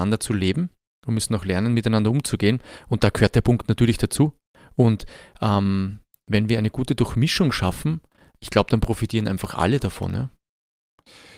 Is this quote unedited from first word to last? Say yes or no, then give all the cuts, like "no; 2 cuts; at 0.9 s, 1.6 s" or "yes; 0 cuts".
yes; 0 cuts